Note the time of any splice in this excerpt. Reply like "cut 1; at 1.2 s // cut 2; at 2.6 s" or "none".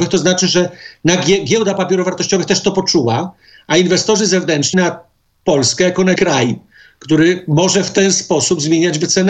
cut 1; at 4.7 s // cut 2; at 6.2 s

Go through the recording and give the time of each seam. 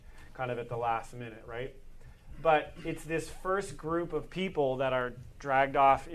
none

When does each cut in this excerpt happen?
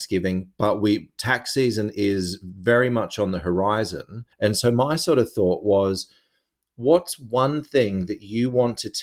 cut 1; at 4.3 s

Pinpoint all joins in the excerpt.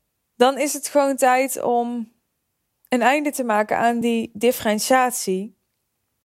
none

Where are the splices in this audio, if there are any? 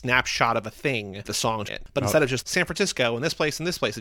cut 1; at 1.3 s // cut 2; at 1.7 s // cut 3; at 2.4 s

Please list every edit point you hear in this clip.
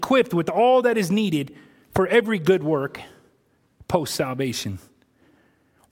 none

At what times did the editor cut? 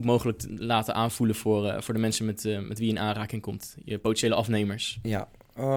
none

